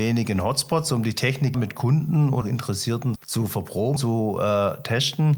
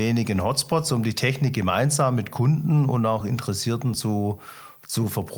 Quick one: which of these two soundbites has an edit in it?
first; 4 cuts; at 1.5 s, 2.4 s, 3.2 s, 4.0 s

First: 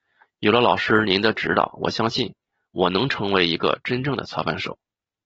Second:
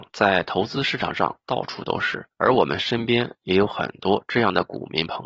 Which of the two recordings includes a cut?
second; 1 cut; at 2.3 s

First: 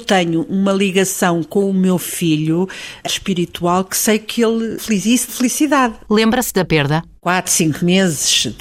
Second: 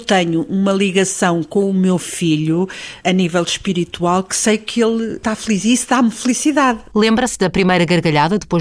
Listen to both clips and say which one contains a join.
first; 4 cuts; at 3.1 s, 4.8 s, 5.3 s, 6.7 s

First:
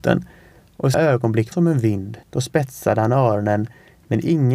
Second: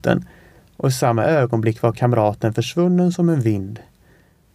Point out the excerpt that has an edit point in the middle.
first; 3 cuts; at 0.9 s, 1.5 s, 2.2 s

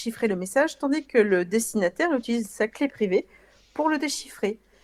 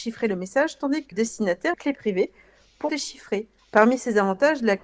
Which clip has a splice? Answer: second; 4 cuts; at 1.1 s, 1.7 s, 2.9 s, 3.6 s

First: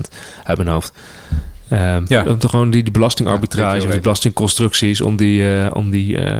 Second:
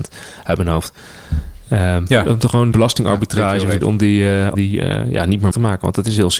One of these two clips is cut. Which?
second; 4 cuts; at 2.7 s, 3.8 s, 4.5 s, 5.5 s

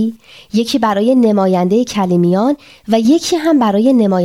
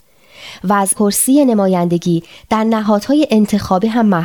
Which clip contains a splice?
second; 1 cut; at 0.9 s

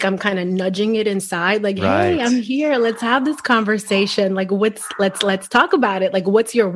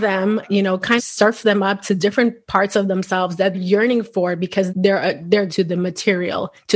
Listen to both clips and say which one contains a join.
second; 4 cuts; at 1.0 s, 3.5 s, 4.7 s, 5.5 s

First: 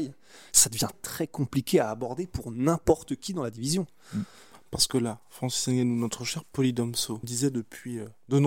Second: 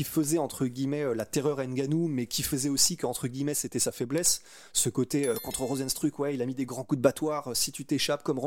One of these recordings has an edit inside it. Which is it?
first; 2 cuts; at 0.9 s, 7.2 s

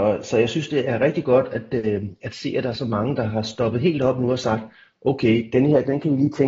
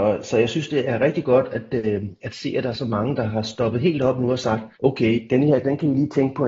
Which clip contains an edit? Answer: second; 1 cut; at 4.7 s

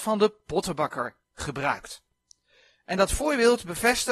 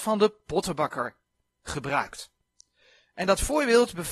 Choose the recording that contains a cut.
first; 1 cut; at 1.2 s

